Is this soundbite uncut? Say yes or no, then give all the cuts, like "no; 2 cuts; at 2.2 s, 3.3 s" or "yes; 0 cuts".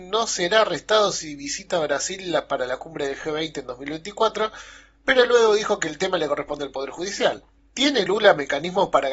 yes; 0 cuts